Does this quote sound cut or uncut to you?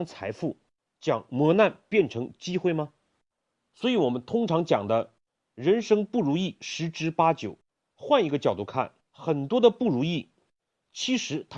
cut